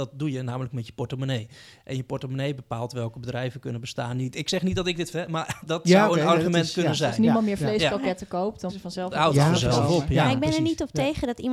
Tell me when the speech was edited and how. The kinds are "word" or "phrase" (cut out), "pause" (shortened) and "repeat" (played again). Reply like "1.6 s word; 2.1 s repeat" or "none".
5.1 s word; 5.6 s word; 8.7 s word